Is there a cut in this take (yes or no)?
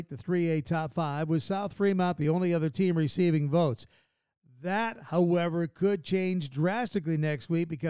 no